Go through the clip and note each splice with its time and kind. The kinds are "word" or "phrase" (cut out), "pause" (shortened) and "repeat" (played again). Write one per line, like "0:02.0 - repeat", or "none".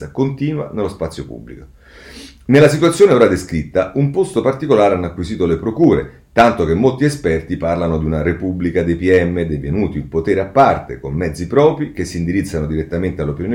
none

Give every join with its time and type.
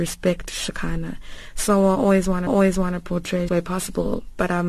0:02.5 - repeat
0:03.5 - phrase

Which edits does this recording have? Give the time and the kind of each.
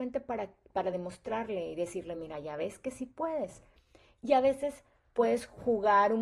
none

